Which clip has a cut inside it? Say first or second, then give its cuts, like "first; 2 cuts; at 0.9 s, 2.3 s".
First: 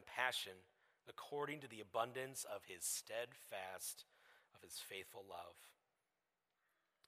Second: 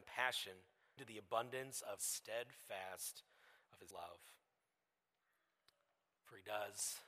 second; 3 cuts; at 1.0 s, 2.0 s, 3.9 s